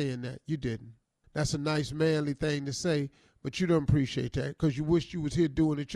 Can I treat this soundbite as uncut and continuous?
yes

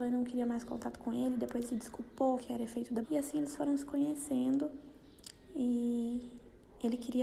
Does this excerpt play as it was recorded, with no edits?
no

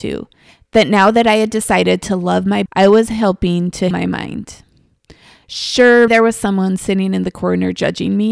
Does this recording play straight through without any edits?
no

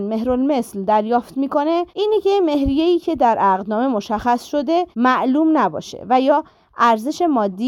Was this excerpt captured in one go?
no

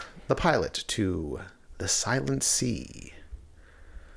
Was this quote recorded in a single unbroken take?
yes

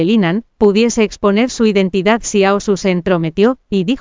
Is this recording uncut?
yes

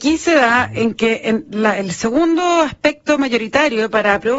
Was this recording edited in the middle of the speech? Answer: no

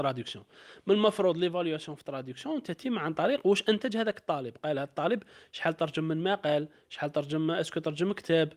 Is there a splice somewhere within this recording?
no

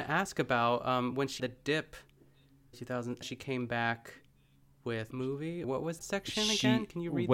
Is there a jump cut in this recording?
yes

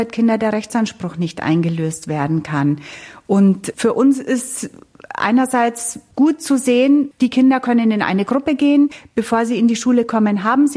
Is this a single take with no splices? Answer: yes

